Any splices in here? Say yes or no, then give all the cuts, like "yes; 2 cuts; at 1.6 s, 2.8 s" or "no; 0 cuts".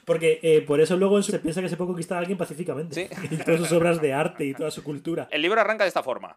yes; 2 cuts; at 1.3 s, 3.4 s